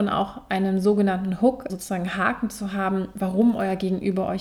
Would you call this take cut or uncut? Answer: cut